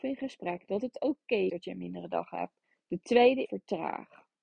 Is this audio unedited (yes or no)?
no